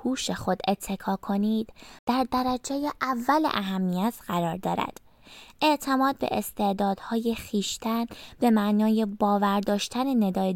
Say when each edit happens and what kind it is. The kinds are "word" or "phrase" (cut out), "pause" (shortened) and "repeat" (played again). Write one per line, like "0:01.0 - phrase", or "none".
none